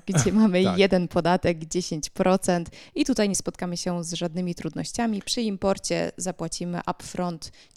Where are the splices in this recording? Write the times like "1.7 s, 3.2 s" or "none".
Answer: none